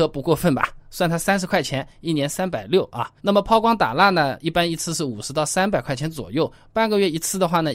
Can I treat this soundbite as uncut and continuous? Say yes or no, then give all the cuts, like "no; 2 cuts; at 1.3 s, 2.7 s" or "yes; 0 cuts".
no; 1 cut; at 3.2 s